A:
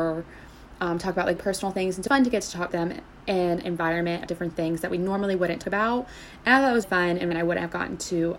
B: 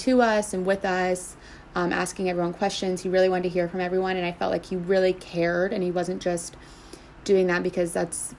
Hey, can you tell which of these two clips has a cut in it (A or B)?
A